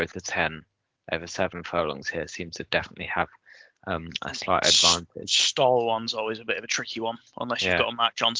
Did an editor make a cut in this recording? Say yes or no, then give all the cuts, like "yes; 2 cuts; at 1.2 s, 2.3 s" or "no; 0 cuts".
no; 0 cuts